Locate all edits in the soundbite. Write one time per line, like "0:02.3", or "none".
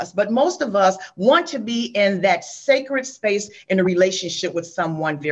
none